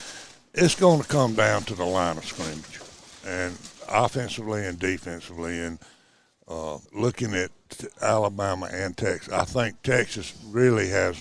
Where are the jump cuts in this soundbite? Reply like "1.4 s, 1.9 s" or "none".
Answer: 6.9 s